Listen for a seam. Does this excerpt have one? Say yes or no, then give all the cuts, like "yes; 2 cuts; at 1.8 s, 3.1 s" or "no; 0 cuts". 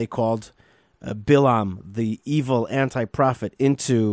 no; 0 cuts